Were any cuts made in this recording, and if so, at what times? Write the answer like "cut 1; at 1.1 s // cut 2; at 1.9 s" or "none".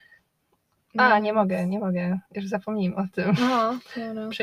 cut 1; at 2.3 s